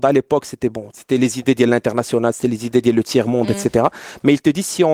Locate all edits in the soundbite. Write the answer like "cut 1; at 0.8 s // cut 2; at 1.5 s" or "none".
none